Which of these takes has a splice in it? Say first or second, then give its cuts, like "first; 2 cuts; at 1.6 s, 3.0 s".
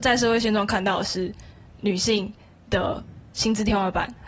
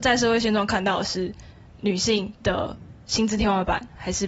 second; 1 cut; at 2.4 s